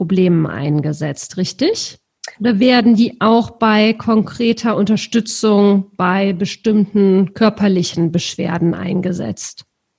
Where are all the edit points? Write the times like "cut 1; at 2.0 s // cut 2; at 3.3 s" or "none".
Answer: cut 1; at 2.3 s